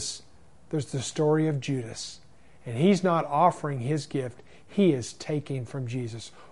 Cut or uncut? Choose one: uncut